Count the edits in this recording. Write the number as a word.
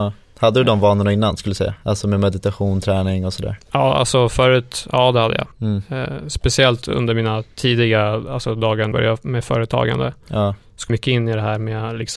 three